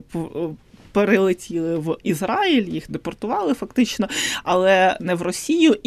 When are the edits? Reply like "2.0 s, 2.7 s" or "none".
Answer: 2.9 s